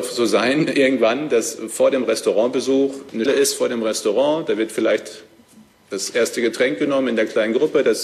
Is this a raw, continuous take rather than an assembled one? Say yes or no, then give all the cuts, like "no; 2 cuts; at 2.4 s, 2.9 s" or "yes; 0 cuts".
no; 1 cut; at 3.3 s